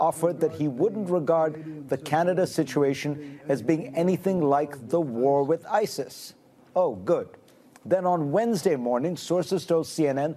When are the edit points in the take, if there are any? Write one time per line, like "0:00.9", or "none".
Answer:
none